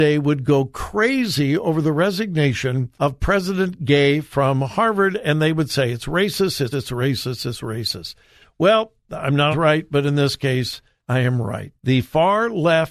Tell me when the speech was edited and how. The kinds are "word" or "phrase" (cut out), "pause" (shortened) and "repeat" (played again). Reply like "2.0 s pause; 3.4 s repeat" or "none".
3.0 s pause; 6.7 s word; 9.5 s word; 11.0 s pause; 11.8 s pause

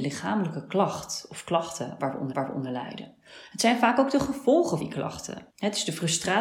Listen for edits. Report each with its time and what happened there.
2.3 s repeat; 4.8 s word; 5.5 s pause

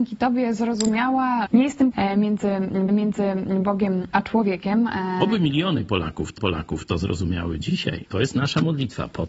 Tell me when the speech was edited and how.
1.5 s phrase; 1.9 s word; 2.9 s repeat; 6.4 s repeat; 8.1 s pause

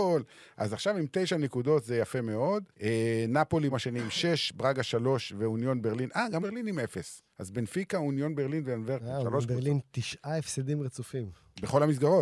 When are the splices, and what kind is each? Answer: 2.7 s pause; 3.7 s word; 6.4 s word; 7.3 s pause

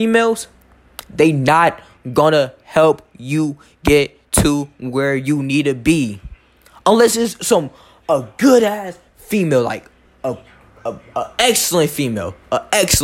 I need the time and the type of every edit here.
none

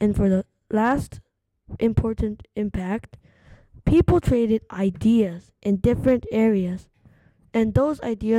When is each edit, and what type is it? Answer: none

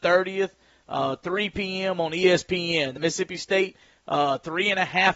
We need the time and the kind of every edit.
3.0 s word

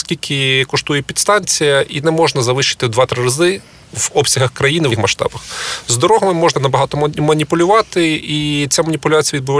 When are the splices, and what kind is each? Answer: 2.0 s word; 4.9 s word; 6.5 s word

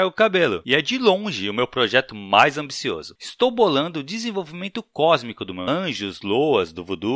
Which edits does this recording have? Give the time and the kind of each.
5.7 s phrase

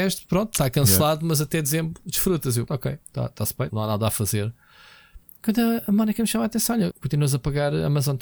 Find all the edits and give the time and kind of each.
2.7 s word; 3.0 s pause; 3.7 s word; 6.9 s word

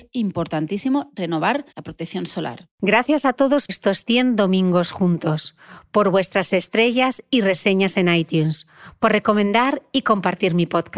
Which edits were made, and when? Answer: 1.7 s pause; 2.7 s pause; 3.7 s word

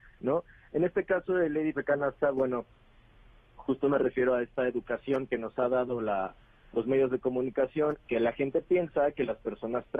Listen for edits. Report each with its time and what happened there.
1.7 s word; 8.0 s word

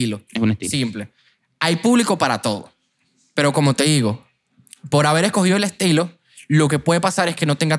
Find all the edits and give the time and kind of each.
none

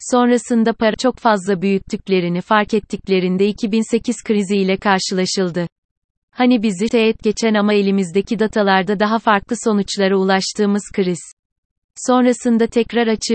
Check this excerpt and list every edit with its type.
0.9 s word; 6.9 s word

